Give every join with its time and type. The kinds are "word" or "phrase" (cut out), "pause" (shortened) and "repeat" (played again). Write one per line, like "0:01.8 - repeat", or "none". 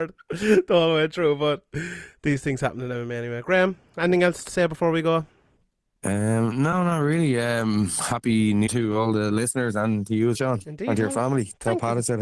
0:04.5 - word
0:08.7 - word
0:10.3 - word

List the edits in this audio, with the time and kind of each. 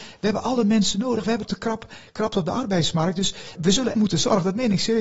0:01.5 - word
0:03.5 - word
0:03.9 - word

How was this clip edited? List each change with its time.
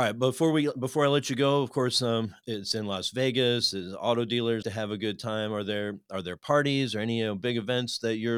0:04.6 - word

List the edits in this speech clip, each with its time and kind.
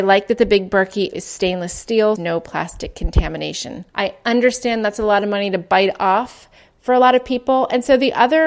0:01.1 - word
0:02.2 - phrase
0:03.9 - pause

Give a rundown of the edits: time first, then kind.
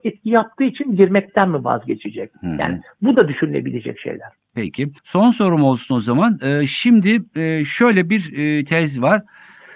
0:05.0 - pause

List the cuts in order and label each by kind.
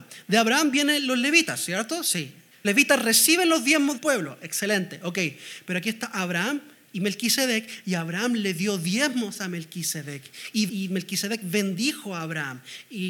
0:02.6 - word
0:04.0 - word
0:10.7 - word

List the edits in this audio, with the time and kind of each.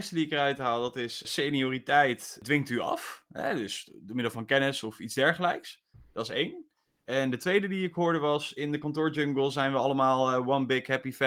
none

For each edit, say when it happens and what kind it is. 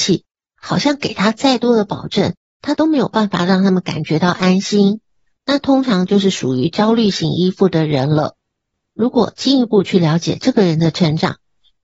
none

